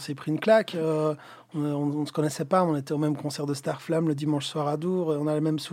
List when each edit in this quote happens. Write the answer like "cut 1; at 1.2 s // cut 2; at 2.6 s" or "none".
none